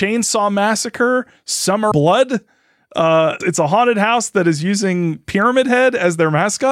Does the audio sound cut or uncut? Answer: cut